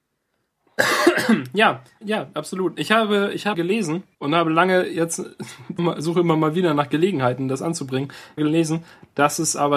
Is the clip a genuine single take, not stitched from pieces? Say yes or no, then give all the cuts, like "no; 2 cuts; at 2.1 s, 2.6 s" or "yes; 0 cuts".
no; 5 cuts; at 2.0 s, 3.5 s, 4.1 s, 5.8 s, 8.4 s